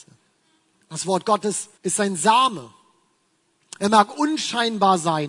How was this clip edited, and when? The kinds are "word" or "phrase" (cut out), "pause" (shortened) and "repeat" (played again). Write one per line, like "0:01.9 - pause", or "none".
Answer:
0:01.8 - pause